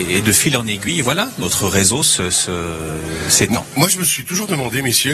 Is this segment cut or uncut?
uncut